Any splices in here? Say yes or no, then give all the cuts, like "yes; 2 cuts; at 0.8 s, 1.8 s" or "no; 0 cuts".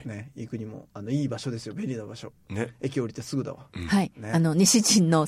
no; 0 cuts